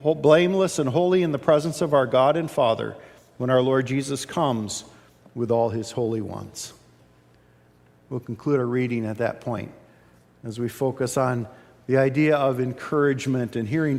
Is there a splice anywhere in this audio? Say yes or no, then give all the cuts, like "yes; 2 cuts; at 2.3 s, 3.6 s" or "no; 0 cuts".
no; 0 cuts